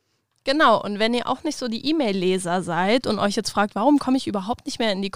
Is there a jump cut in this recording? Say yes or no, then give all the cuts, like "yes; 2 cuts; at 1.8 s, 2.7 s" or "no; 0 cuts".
no; 0 cuts